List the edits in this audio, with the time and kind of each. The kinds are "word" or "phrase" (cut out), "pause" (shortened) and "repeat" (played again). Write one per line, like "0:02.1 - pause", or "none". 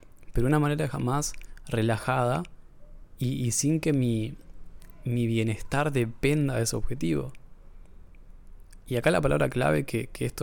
none